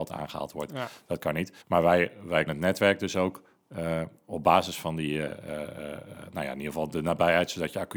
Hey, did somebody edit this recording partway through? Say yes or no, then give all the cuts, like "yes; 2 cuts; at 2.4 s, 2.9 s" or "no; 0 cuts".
yes; 2 cuts; at 1.6 s, 2.5 s